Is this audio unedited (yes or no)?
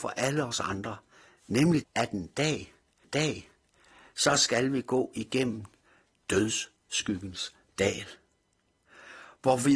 no